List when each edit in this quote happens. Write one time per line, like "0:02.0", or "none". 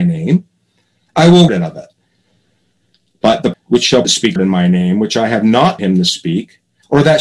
0:01.5
0:03.5
0:04.0
0:04.4
0:05.8